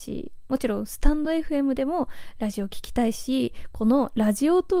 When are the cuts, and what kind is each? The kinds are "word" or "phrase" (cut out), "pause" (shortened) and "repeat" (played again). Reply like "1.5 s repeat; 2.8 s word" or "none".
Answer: none